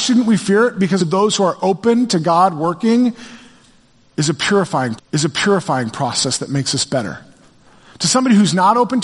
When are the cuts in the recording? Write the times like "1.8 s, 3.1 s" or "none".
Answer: 1.0 s, 5.0 s